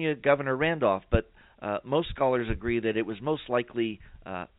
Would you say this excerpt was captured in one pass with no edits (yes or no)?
yes